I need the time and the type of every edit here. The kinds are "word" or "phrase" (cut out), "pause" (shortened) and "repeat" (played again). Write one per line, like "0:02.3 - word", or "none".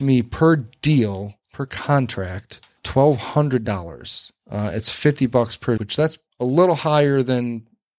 0:01.4 - pause
0:02.8 - pause
0:04.4 - pause
0:05.8 - word
0:06.3 - pause